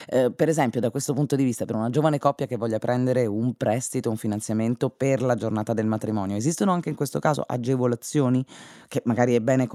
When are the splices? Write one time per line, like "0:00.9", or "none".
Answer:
none